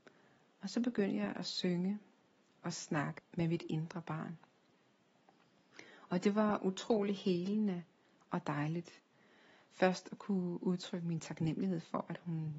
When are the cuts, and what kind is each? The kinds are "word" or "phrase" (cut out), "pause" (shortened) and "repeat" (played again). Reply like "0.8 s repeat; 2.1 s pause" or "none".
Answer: 2.6 s word; 3.2 s word